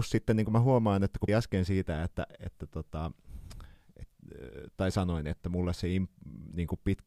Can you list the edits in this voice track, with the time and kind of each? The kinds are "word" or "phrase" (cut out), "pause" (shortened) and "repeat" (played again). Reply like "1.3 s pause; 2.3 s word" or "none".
1.3 s word